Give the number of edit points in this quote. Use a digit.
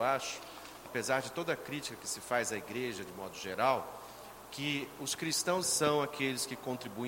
1